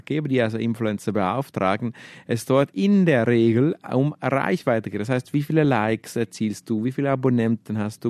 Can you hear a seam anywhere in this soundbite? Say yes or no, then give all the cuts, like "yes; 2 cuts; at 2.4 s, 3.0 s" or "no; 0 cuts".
no; 0 cuts